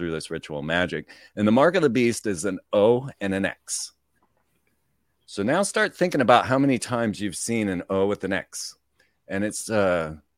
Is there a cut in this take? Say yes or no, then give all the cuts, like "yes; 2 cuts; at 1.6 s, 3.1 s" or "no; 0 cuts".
no; 0 cuts